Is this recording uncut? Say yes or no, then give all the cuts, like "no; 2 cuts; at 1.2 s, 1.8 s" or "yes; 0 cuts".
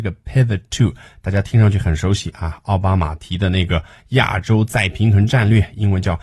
yes; 0 cuts